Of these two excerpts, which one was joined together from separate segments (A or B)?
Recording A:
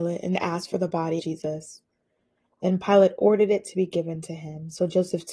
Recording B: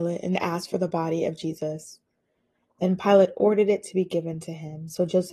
A